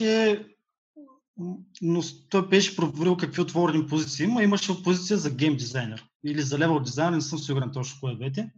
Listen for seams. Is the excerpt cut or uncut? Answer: uncut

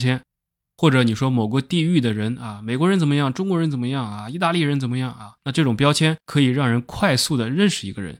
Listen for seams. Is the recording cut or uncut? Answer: cut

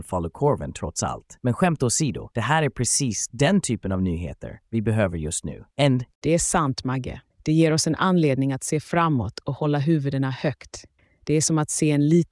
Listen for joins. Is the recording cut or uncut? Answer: cut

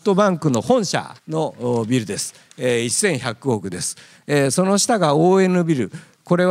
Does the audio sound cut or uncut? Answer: cut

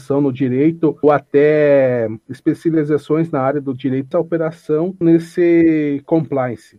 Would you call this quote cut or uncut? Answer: cut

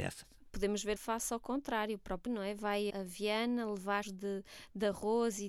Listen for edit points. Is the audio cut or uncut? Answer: cut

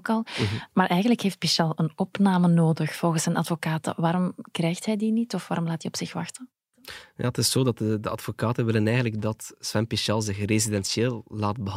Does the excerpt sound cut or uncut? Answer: uncut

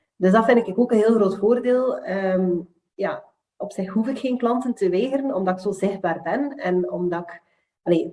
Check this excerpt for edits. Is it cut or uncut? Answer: uncut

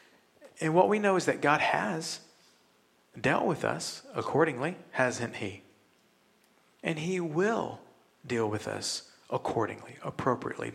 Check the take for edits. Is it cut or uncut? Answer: uncut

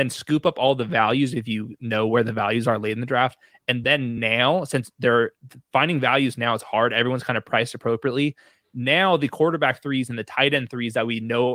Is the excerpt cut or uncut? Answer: uncut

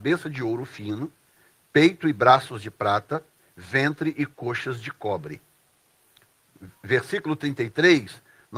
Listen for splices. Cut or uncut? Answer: uncut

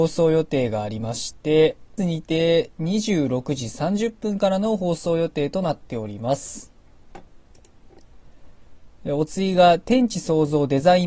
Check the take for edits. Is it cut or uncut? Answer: cut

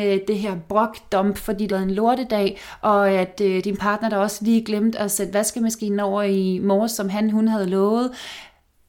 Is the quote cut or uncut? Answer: cut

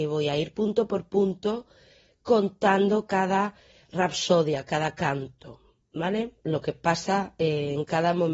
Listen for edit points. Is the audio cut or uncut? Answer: uncut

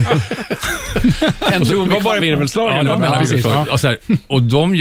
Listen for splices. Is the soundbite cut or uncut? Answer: cut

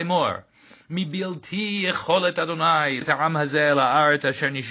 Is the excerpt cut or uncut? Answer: cut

